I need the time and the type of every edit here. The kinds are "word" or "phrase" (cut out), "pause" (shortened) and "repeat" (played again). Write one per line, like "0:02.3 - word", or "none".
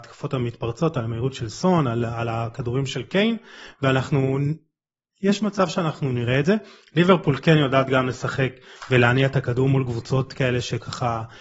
none